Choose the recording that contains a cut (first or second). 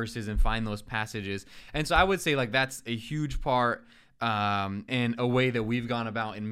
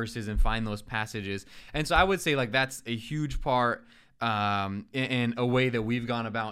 first